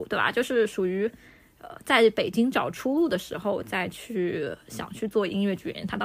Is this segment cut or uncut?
uncut